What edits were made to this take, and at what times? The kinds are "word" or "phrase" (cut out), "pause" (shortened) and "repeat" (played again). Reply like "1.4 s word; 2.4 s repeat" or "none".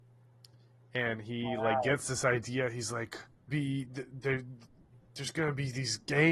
3.5 s phrase